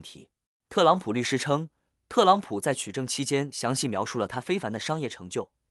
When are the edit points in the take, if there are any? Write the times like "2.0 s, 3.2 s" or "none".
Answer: none